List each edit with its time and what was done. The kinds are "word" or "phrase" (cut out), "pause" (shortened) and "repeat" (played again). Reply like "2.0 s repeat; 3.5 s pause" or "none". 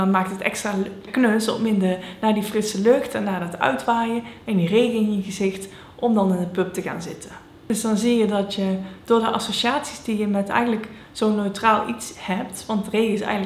1.1 s word